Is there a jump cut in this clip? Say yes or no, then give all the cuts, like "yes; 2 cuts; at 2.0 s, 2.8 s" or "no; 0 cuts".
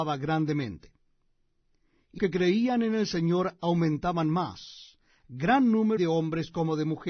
yes; 2 cuts; at 2.2 s, 6.0 s